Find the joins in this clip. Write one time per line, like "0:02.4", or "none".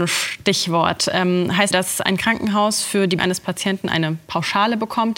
0:01.7
0:03.2